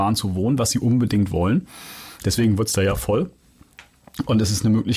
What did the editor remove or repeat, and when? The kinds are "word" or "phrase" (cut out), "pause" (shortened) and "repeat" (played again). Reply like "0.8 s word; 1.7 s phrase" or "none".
none